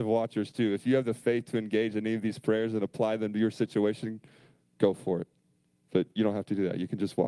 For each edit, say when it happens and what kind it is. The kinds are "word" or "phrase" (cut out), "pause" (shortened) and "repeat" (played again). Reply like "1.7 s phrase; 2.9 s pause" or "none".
none